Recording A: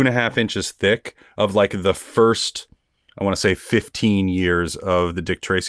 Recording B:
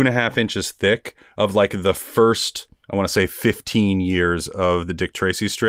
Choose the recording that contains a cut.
B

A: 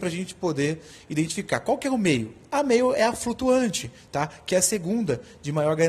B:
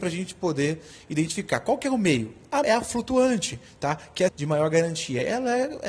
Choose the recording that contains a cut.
B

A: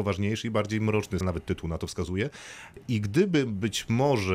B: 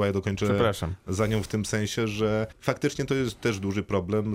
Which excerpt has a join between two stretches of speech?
A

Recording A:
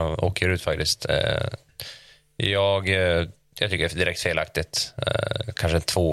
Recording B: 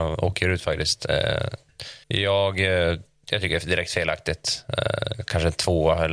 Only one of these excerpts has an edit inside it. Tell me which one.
B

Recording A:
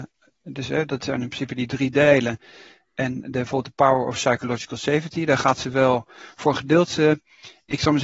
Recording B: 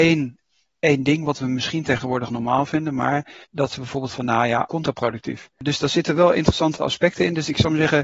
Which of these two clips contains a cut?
B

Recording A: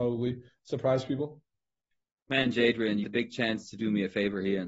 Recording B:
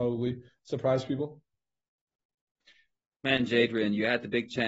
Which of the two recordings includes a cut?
A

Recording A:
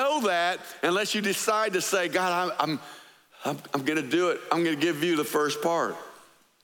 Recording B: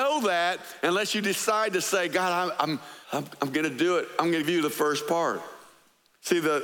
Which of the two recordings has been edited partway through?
B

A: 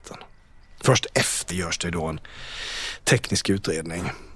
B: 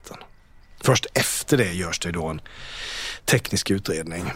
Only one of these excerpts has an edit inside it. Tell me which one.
A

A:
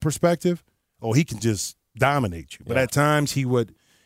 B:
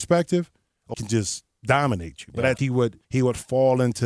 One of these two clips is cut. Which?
B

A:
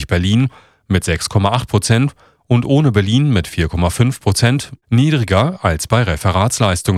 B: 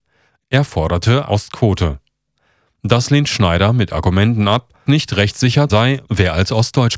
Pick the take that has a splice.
B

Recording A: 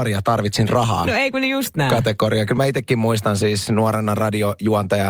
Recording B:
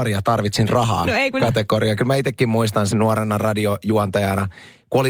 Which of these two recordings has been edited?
B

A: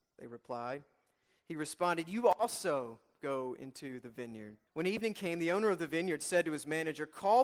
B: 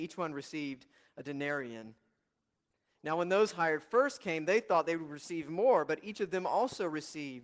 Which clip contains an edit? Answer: A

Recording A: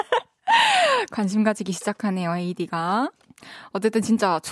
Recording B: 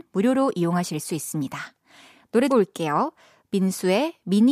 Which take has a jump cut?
B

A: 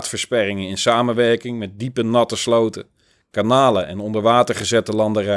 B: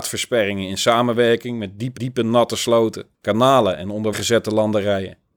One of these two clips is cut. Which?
B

